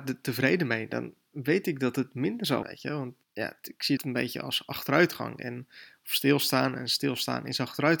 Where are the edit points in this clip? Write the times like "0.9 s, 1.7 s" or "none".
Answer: 2.6 s, 3.2 s, 4.0 s